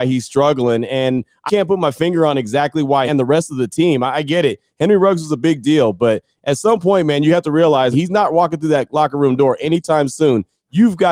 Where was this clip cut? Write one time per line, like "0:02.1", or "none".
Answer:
0:01.5
0:03.1
0:07.9